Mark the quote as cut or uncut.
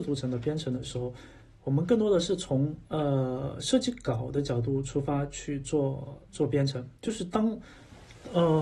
cut